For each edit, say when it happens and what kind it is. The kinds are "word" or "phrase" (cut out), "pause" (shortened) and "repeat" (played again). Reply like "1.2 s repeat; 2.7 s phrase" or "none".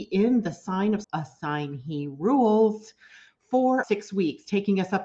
1.0 s word; 3.8 s word